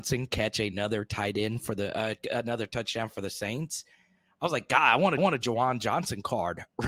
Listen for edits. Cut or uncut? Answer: cut